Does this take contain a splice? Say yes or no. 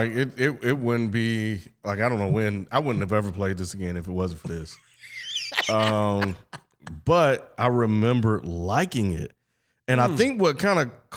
no